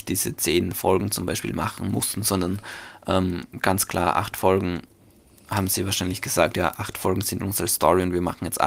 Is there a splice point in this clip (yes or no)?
no